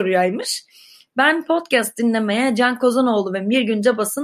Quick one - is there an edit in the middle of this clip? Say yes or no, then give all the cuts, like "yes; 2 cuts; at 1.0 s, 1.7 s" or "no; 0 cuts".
no; 0 cuts